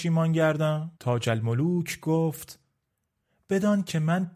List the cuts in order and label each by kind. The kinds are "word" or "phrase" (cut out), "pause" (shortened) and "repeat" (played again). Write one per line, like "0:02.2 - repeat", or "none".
0:01.0 - pause